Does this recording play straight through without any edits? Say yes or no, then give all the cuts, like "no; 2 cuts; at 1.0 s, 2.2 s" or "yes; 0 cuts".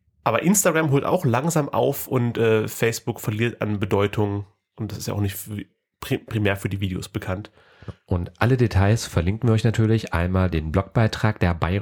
yes; 0 cuts